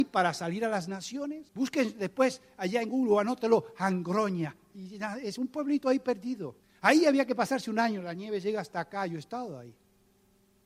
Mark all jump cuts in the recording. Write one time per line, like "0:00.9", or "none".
0:01.5
0:06.6